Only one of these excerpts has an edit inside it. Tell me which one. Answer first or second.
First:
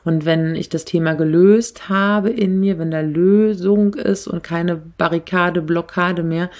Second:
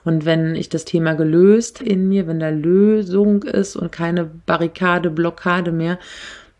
second